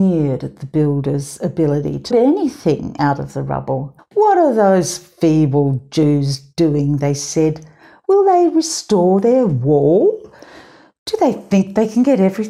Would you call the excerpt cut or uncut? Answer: cut